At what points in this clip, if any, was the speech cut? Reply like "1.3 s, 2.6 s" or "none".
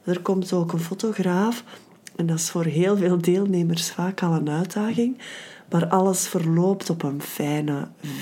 none